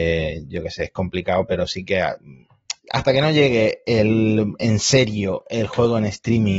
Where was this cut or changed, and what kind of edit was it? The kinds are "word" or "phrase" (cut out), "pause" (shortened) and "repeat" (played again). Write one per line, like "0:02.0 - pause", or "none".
0:02.8 - pause